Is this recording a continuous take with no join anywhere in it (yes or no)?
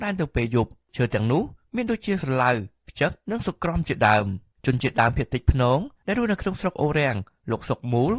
no